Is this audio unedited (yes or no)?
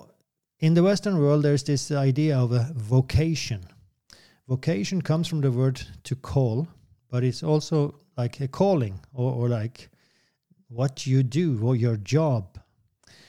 yes